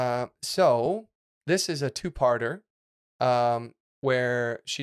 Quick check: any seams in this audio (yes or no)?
no